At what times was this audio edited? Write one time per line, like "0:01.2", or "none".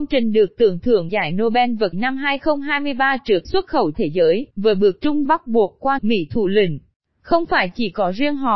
0:01.1
0:01.9
0:03.4
0:03.9
0:04.5
0:05.2
0:06.0